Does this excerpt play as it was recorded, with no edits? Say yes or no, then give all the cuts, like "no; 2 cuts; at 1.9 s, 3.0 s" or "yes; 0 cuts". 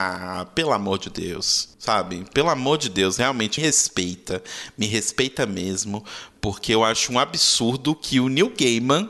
no; 1 cut; at 3.6 s